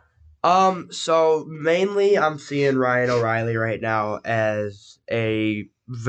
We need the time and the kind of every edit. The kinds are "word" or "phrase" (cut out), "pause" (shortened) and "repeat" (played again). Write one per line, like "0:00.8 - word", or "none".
none